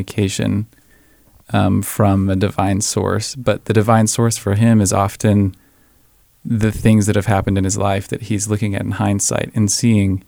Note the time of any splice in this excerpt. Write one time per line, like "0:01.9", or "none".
none